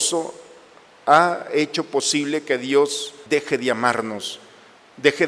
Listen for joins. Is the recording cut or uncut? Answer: cut